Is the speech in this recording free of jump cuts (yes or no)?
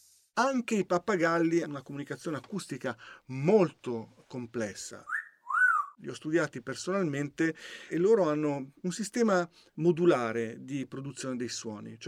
no